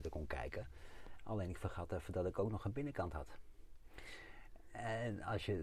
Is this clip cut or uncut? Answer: uncut